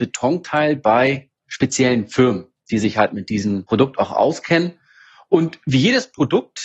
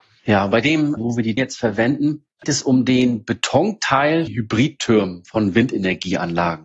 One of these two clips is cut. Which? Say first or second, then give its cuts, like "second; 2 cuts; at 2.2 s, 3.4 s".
second; 4 cuts; at 1.0 s, 1.4 s, 2.4 s, 4.3 s